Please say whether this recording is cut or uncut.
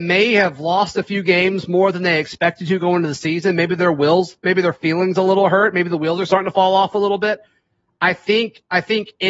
uncut